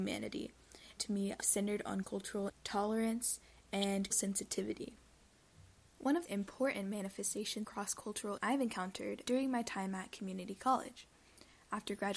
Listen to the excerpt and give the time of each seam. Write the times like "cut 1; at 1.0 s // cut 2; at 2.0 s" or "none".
cut 1; at 1.0 s // cut 2; at 1.4 s // cut 3; at 2.0 s // cut 4; at 2.5 s // cut 5; at 4.1 s // cut 6; at 6.3 s // cut 7; at 7.6 s // cut 8; at 8.4 s // cut 9; at 9.2 s

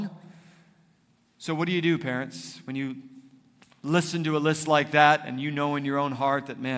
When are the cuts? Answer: none

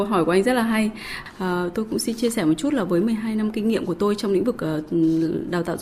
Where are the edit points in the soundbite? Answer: none

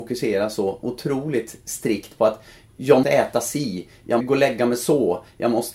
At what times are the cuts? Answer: cut 1; at 3.0 s // cut 2; at 4.2 s

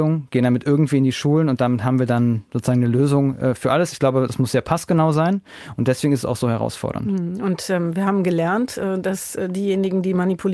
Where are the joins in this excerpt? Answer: none

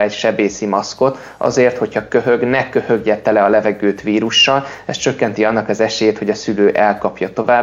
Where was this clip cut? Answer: none

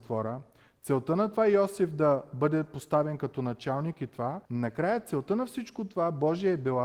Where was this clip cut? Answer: cut 1; at 4.5 s

